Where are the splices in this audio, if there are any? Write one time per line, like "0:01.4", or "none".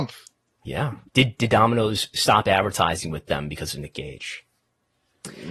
0:01.1